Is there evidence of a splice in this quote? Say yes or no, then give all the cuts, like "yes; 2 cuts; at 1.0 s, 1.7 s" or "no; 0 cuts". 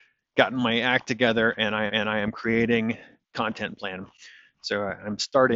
yes; 2 cuts; at 1.9 s, 3.3 s